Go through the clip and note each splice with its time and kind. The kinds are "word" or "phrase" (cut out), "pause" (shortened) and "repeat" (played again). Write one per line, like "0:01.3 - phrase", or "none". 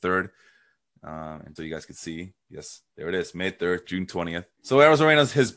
0:01.6 - word
0:02.9 - pause
0:03.8 - word
0:04.5 - pause

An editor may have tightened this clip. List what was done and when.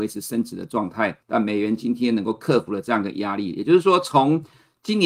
0:01.2 - pause

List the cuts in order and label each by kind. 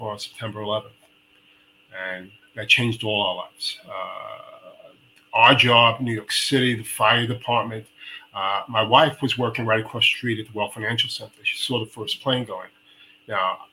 none

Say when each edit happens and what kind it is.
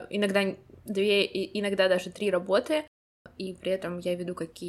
none

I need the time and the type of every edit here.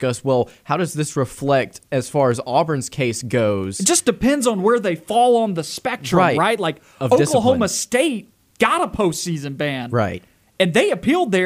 none

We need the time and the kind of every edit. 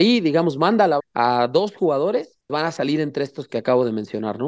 0:01.0 - word
0:02.5 - word

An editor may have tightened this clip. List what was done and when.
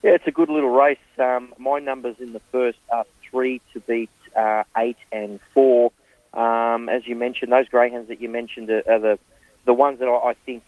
none

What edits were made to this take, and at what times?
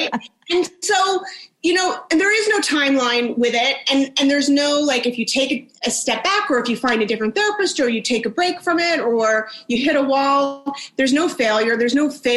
none

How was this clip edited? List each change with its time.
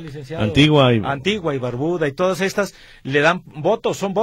none

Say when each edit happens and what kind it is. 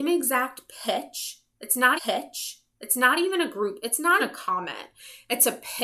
0:02.0 - repeat
0:04.2 - word

